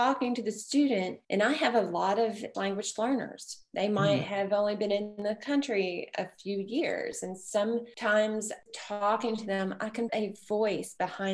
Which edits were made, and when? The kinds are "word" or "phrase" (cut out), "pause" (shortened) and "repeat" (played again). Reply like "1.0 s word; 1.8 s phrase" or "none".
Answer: 1.2 s pause; 2.5 s word; 8.7 s word; 10.1 s word

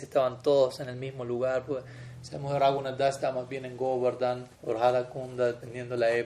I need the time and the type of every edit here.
4.5 s pause

